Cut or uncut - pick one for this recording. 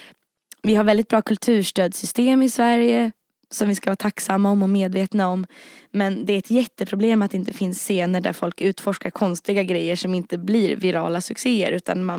uncut